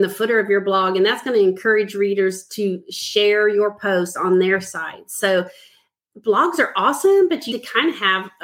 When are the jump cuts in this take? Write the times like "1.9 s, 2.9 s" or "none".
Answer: 7.5 s